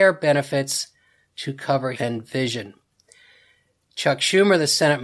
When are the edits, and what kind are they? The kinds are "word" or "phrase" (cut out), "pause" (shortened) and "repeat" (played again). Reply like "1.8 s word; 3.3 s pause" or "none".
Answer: 1.9 s phrase